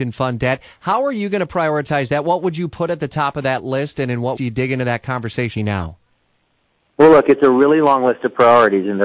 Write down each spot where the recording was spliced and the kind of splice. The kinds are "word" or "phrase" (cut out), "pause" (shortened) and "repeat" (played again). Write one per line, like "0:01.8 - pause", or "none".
0:04.4 - word
0:05.6 - word